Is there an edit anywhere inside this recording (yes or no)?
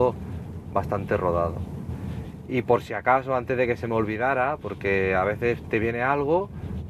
no